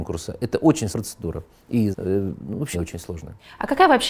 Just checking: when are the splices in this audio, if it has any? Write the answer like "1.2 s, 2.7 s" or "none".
0.9 s, 1.9 s, 2.7 s